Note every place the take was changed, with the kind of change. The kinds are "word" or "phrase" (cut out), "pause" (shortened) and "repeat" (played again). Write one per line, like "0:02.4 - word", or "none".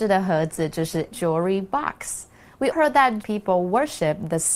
0:01.1 - word
0:02.7 - word
0:03.2 - word